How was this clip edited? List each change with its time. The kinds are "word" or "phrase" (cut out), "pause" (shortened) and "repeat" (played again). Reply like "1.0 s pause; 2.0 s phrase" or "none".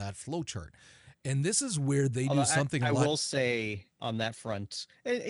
4.0 s word